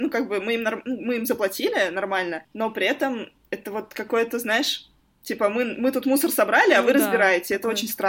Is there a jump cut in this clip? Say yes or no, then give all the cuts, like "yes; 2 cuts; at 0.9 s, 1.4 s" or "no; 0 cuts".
no; 0 cuts